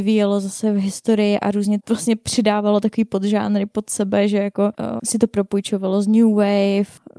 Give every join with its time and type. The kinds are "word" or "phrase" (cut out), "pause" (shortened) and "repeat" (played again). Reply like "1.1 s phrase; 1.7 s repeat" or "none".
1.8 s word; 5.0 s word